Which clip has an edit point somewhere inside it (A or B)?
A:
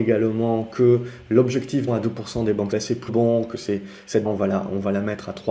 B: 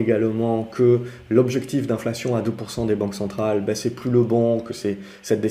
A